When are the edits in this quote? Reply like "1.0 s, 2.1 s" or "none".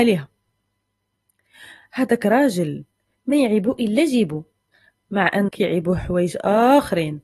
5.5 s